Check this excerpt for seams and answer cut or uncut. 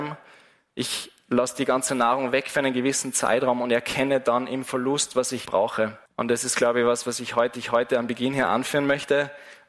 cut